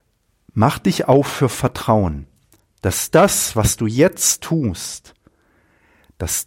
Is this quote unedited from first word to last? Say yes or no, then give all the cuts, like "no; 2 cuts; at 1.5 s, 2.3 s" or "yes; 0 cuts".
yes; 0 cuts